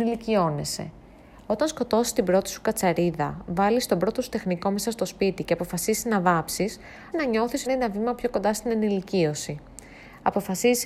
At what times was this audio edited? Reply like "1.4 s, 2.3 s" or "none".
7.1 s, 7.7 s